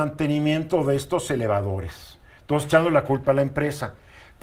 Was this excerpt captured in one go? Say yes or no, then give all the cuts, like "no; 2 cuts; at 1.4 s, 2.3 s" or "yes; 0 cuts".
yes; 0 cuts